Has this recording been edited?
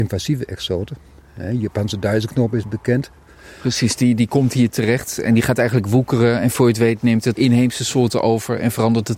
yes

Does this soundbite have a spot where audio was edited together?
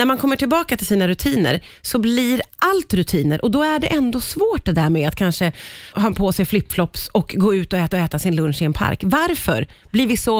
yes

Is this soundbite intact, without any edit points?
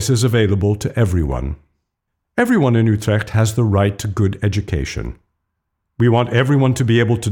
yes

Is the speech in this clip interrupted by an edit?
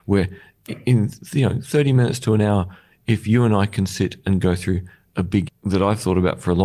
yes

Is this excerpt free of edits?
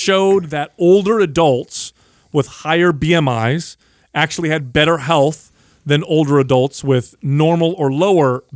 yes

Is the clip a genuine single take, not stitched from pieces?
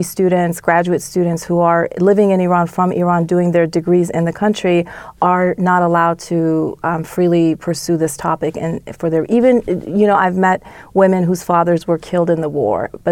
yes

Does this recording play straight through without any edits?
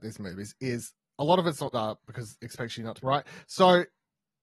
no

